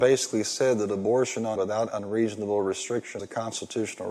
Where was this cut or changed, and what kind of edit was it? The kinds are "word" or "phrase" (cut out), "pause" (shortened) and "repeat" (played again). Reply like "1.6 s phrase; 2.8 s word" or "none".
1.5 s word; 3.2 s word

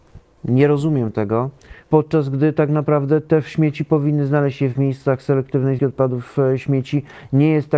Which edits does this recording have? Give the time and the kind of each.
1.8 s pause; 5.8 s word

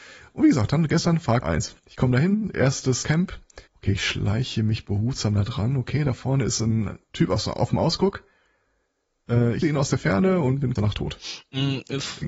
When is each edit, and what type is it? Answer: 1.4 s word; 1.8 s pause; 3.0 s phrase; 3.7 s pause; 9.6 s word; 10.8 s word

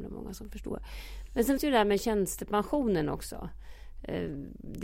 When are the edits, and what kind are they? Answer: 1.6 s word

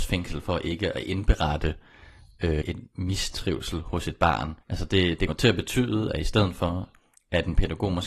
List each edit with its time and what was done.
2.6 s word; 4.6 s pause; 5.3 s word

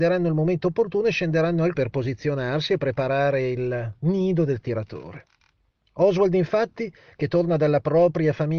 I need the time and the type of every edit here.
1.7 s word

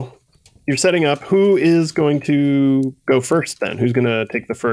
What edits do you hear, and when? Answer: none

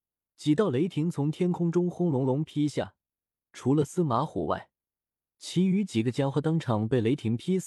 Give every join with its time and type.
none

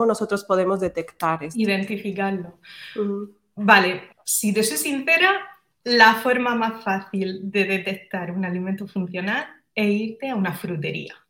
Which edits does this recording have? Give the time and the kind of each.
4.1 s word

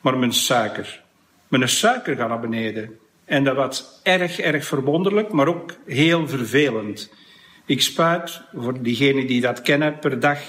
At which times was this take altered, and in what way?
none

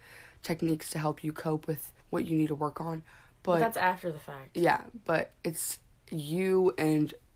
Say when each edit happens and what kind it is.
2.0 s pause

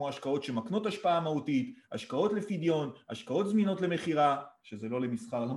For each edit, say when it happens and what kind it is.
none

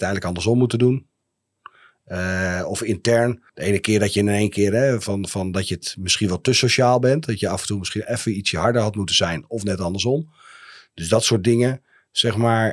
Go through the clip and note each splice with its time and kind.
3.5 s pause

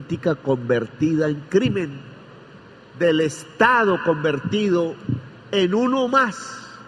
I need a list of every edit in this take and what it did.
none

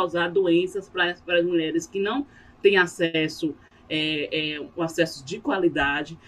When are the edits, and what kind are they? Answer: none

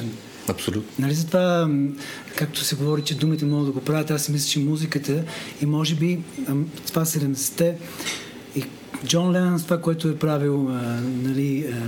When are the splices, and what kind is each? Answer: none

